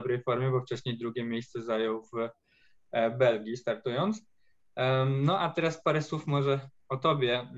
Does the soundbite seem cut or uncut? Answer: uncut